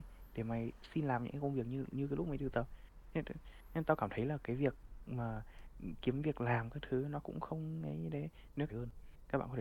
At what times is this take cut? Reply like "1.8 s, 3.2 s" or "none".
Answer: 8.7 s